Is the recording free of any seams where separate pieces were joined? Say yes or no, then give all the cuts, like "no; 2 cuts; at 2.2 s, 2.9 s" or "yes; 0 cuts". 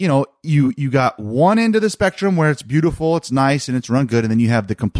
yes; 0 cuts